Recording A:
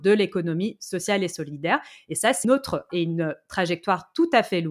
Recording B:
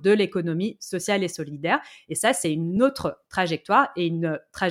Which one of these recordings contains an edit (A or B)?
A